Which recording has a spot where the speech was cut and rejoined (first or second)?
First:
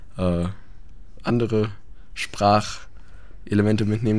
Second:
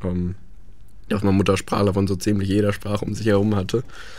first